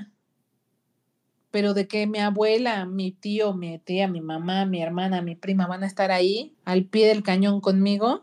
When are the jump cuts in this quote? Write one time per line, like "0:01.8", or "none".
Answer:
0:06.5